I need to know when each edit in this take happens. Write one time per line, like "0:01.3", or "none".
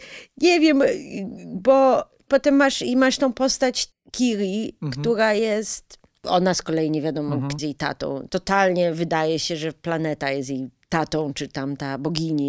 0:07.6
0:08.3